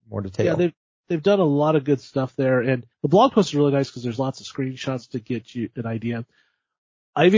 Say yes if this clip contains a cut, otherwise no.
yes